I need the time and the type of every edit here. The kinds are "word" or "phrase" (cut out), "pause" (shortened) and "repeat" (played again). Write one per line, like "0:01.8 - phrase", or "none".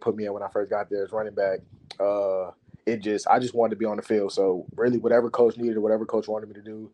none